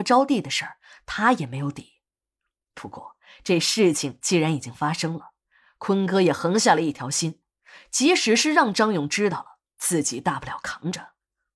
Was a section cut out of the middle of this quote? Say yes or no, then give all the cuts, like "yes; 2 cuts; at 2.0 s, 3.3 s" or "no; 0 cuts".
no; 0 cuts